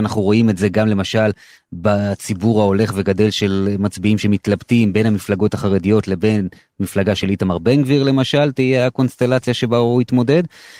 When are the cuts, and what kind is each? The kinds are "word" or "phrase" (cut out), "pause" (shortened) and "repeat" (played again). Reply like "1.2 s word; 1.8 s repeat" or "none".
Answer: none